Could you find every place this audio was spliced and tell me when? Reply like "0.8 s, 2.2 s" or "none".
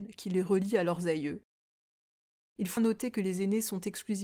2.8 s

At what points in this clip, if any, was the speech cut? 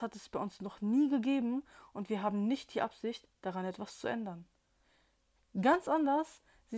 none

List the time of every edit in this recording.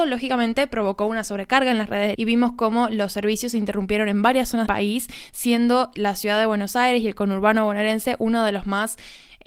2.1 s, 4.6 s, 5.9 s

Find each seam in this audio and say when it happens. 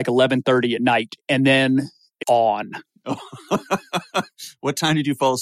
1.2 s, 2.2 s

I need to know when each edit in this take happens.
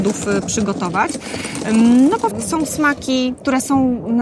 2.3 s

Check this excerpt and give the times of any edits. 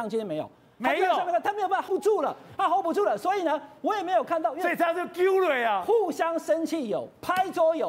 1.9 s

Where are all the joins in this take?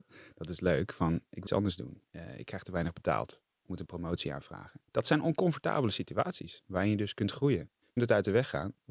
1.5 s, 2.1 s, 3.5 s, 4.9 s, 8.0 s

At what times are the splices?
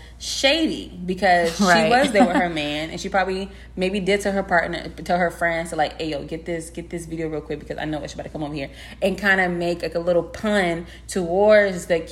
none

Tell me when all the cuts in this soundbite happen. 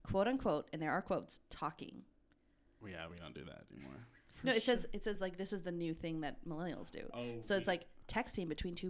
none

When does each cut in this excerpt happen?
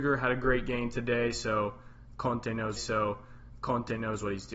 2.8 s

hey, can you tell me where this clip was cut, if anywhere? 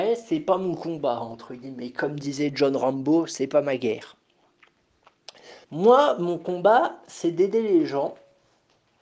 5.6 s

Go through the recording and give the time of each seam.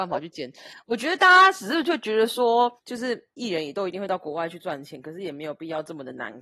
2.8 s

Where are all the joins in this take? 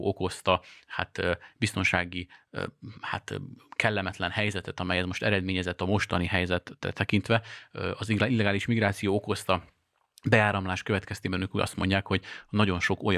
none

